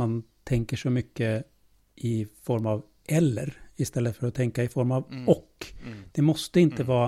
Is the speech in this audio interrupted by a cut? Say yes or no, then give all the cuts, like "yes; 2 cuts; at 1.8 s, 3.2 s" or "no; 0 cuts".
no; 0 cuts